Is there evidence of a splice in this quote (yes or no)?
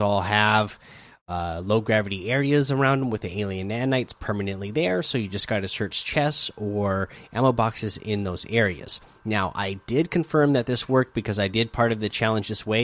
no